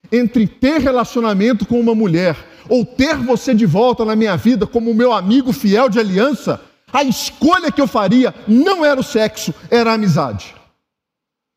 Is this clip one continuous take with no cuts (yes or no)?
yes